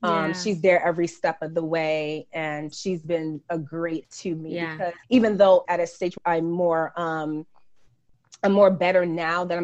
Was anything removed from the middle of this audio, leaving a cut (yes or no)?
yes